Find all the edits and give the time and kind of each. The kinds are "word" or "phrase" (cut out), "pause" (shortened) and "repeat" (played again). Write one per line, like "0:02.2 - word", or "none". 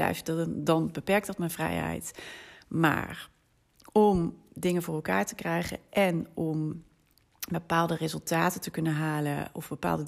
none